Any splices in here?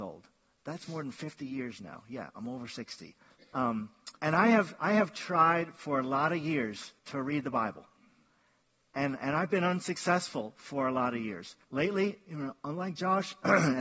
yes; 3 cuts; at 4.2 s, 7.0 s, 11.6 s

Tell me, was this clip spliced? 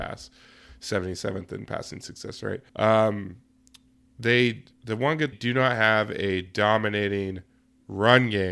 yes; 3 cuts; at 2.7 s, 4.7 s, 5.3 s

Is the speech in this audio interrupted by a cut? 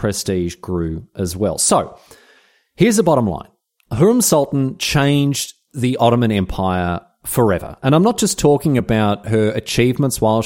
no; 0 cuts

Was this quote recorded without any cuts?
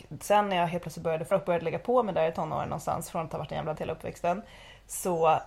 no; 2 cuts; at 1.3 s, 3.8 s

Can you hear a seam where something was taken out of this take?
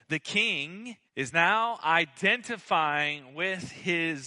yes; 1 cut; at 1.1 s

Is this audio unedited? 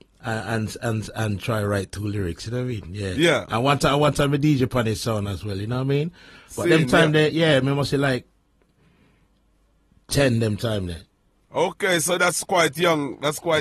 yes; 0 cuts

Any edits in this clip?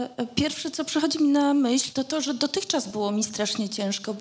no; 0 cuts

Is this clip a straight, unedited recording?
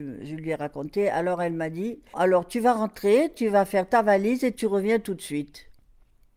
no; 1 cut; at 2.1 s

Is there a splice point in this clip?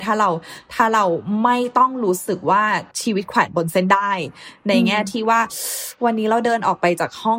yes; 1 cut; at 2.9 s

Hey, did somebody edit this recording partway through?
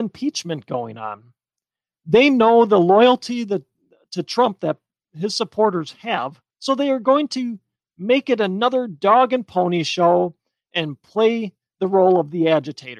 yes; 1 cut; at 6.5 s

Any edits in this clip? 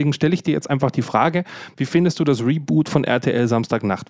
no; 0 cuts

